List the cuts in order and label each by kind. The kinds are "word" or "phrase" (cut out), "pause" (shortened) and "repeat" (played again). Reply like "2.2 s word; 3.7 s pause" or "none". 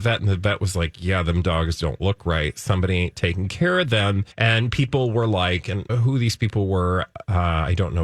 4.3 s pause; 5.9 s word